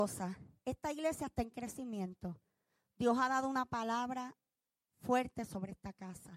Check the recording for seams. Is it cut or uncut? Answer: uncut